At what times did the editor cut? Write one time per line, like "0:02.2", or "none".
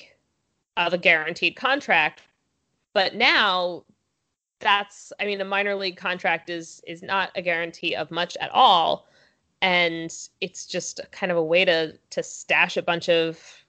none